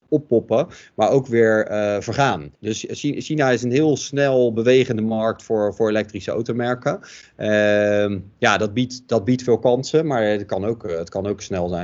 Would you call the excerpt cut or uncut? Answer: cut